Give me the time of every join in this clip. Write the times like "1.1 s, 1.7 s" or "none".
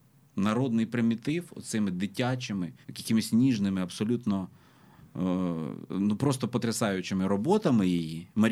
2.8 s